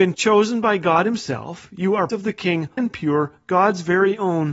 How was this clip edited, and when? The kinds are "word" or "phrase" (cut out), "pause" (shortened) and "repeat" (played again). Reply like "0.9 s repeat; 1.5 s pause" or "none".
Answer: 2.1 s word; 2.8 s word